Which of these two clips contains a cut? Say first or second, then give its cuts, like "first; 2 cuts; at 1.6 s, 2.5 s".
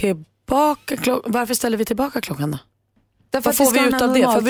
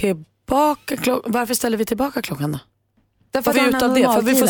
second; 1 cut; at 3.5 s